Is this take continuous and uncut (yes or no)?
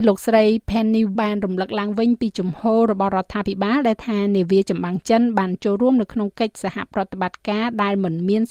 no